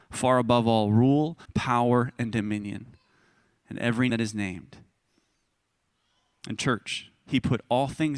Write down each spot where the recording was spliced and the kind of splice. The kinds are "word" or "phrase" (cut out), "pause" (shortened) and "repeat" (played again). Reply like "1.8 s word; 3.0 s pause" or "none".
1.5 s word; 4.1 s word